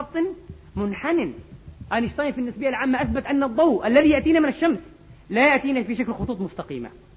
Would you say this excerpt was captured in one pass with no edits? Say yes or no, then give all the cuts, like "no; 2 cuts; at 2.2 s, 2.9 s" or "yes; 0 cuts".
yes; 0 cuts